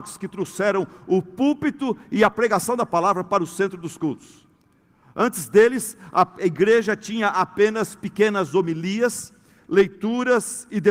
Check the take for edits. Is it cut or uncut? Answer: uncut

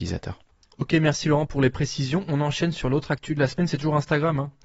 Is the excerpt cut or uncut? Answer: uncut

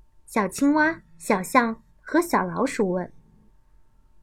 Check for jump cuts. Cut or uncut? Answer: cut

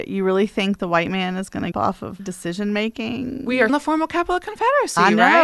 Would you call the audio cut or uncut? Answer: cut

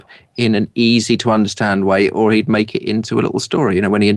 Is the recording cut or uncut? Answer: uncut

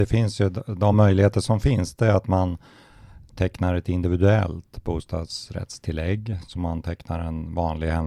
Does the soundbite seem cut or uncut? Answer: uncut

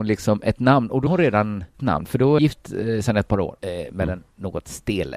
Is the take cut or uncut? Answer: cut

